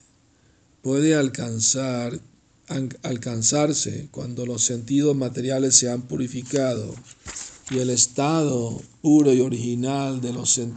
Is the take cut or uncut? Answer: cut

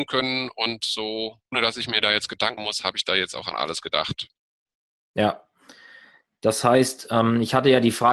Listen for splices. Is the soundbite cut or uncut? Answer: cut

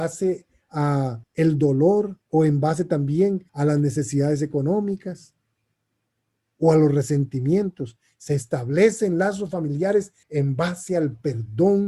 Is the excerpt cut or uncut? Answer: cut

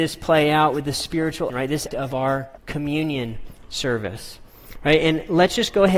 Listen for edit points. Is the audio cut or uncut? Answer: cut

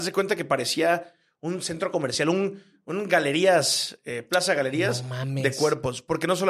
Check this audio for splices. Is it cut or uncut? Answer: uncut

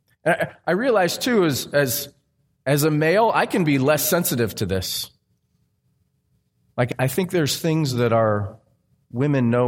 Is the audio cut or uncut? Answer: uncut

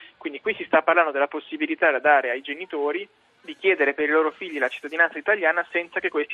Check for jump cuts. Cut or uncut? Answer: cut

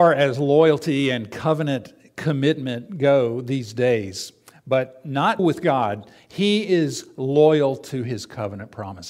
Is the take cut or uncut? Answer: cut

